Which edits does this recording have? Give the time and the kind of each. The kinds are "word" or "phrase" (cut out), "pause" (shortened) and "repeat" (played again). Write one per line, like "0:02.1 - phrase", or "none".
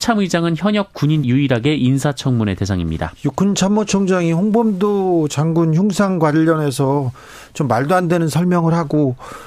0:01.2 - word